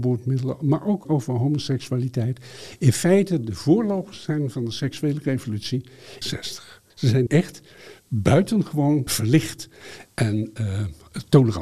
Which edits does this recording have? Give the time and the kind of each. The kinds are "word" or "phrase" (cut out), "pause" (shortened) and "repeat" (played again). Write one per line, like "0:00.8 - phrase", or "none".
0:01.0 - phrase
0:06.2 - phrase
0:06.9 - pause
0:07.3 - word
0:09.1 - word